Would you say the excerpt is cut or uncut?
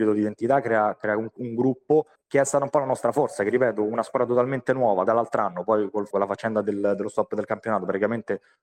cut